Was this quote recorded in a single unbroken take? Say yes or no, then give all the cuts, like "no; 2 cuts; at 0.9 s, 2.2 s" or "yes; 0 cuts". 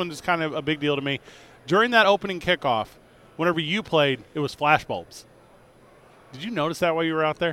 yes; 0 cuts